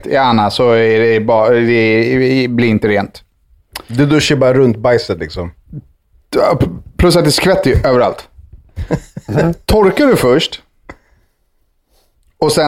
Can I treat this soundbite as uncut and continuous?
yes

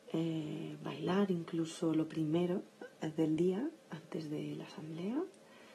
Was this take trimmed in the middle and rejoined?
no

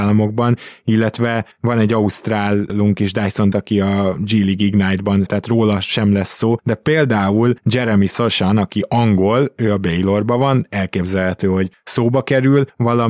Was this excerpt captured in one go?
no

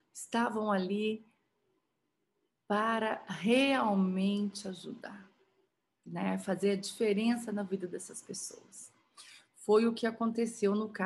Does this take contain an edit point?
no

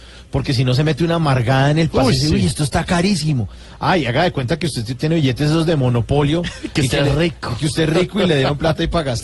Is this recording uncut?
yes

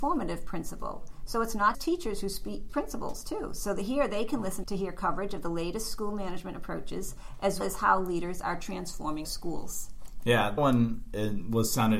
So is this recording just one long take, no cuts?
no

